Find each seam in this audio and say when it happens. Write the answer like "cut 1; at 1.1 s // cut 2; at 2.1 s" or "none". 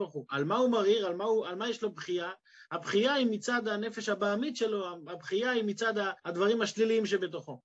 cut 1; at 6.2 s